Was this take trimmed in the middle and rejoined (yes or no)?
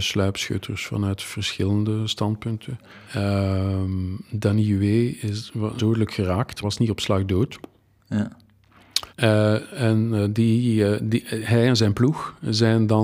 yes